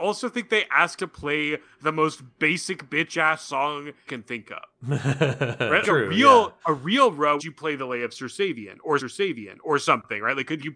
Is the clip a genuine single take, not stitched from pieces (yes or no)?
no